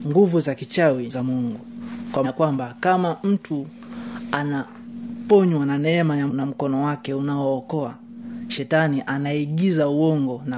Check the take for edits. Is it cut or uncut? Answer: cut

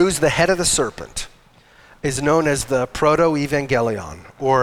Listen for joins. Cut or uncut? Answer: uncut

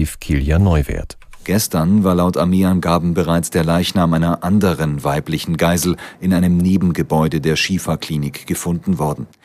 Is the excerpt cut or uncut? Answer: uncut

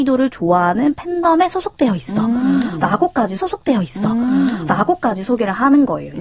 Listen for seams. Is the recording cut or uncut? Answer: cut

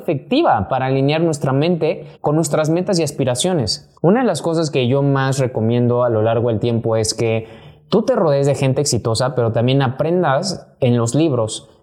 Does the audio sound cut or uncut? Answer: cut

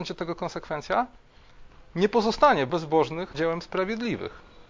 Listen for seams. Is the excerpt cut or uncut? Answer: cut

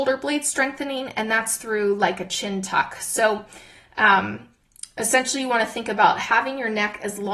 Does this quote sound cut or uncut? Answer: uncut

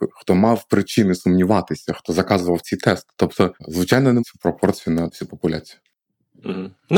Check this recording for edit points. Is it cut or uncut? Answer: cut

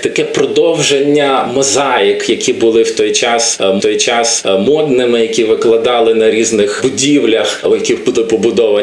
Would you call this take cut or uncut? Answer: cut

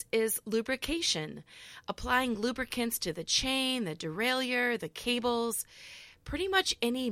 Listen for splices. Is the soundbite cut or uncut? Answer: uncut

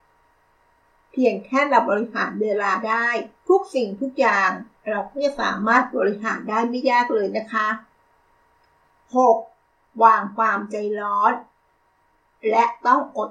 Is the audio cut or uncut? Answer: cut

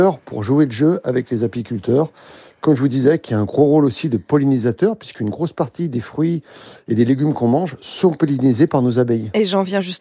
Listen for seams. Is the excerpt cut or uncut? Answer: uncut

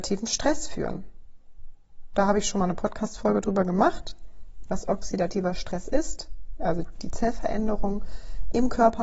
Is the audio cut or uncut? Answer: uncut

